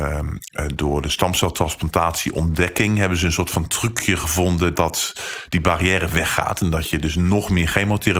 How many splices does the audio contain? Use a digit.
1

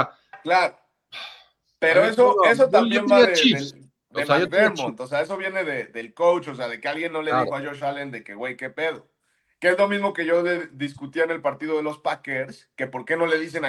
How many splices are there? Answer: 0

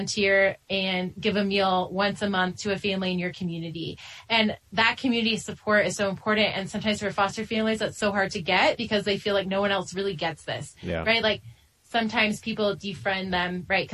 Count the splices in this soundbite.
0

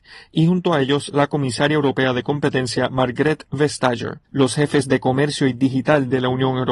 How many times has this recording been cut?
1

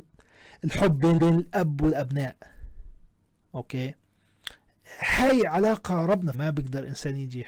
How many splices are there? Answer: 3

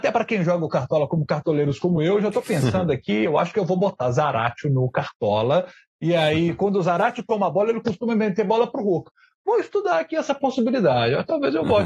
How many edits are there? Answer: 0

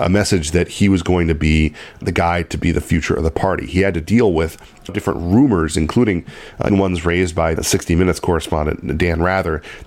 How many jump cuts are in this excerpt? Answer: 4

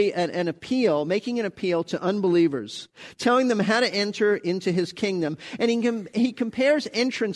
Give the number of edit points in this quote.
0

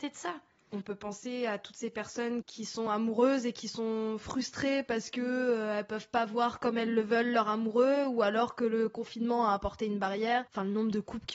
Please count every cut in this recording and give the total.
0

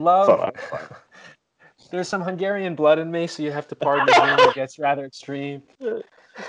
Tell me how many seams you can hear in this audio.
0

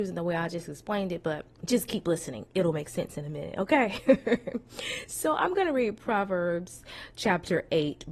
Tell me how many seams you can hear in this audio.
1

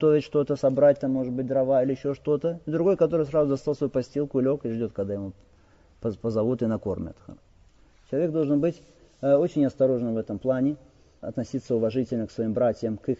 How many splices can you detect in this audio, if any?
0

